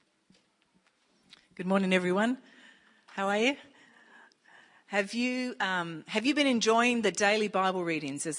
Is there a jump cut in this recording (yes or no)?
no